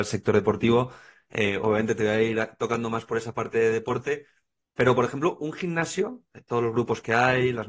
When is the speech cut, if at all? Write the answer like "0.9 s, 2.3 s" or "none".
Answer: none